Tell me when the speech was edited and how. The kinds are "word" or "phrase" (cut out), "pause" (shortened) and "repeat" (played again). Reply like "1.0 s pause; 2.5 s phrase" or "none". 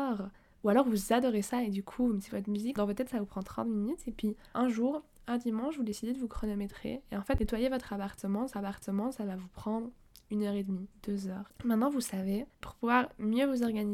8.5 s repeat; 10.9 s pause; 12.5 s pause